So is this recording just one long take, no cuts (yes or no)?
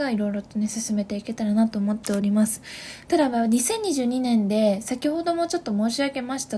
yes